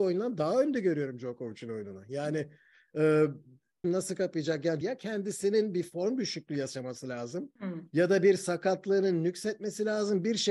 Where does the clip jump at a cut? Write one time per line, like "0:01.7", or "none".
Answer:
0:03.8
0:04.8
0:07.6